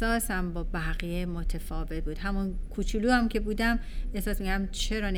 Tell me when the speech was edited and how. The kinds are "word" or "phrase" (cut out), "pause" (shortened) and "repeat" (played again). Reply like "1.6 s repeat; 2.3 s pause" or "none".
none